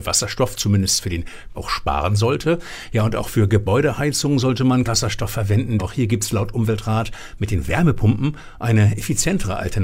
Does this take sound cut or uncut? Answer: cut